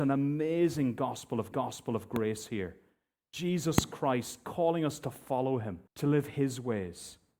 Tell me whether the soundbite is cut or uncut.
cut